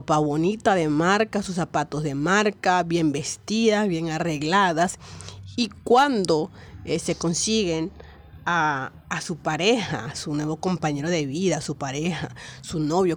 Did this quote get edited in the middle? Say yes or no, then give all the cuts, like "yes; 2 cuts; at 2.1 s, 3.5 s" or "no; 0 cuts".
yes; 1 cut; at 9.0 s